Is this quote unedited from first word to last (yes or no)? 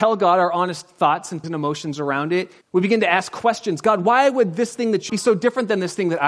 no